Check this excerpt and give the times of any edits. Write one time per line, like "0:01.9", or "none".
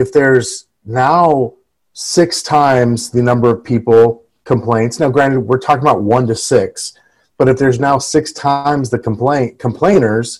none